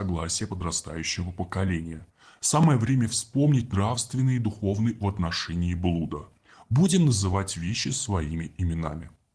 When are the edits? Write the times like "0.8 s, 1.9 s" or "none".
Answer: 5.0 s